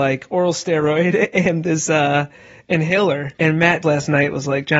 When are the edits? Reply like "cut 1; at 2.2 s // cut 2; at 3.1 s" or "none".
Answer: cut 1; at 3.3 s // cut 2; at 3.8 s